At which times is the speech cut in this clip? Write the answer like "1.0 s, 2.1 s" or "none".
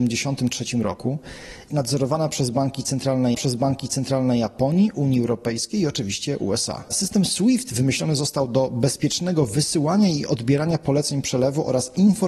1.7 s, 3.3 s

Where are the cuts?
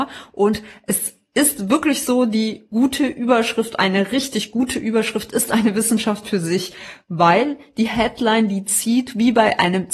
none

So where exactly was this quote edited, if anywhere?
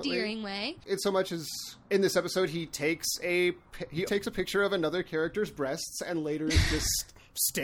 4.1 s

